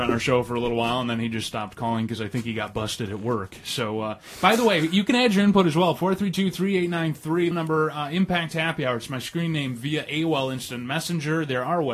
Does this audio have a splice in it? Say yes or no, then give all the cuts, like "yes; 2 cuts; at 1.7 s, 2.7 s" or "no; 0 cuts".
yes; 1 cut; at 7.5 s